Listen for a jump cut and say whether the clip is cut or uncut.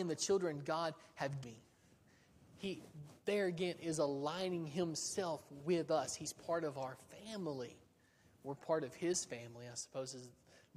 cut